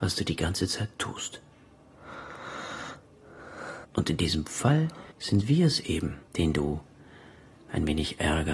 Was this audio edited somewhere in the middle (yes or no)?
yes